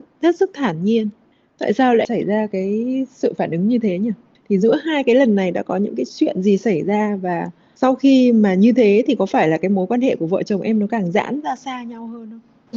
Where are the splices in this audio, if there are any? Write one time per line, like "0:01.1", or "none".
none